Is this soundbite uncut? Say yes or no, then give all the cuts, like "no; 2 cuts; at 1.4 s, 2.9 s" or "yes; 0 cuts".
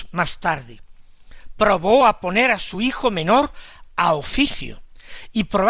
yes; 0 cuts